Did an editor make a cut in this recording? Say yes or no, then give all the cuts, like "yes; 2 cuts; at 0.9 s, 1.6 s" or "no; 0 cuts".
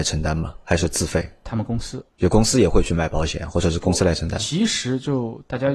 yes; 1 cut; at 2.1 s